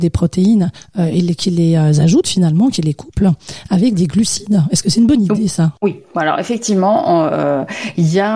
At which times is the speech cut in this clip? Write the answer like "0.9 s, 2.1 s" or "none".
5.8 s